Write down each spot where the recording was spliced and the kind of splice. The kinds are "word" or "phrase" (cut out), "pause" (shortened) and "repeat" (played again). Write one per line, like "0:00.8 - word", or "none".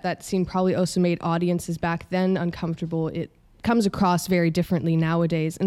none